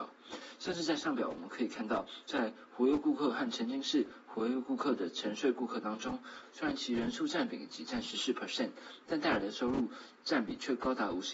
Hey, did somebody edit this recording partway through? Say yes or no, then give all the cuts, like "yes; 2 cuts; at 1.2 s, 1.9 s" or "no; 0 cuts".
yes; 1 cut; at 10.2 s